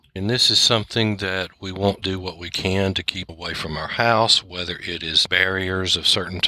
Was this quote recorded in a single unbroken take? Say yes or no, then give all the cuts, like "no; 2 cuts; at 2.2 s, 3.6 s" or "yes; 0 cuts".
no; 3 cuts; at 2.0 s, 3.3 s, 5.3 s